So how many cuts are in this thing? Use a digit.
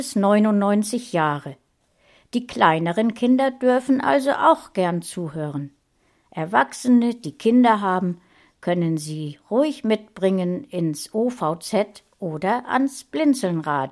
0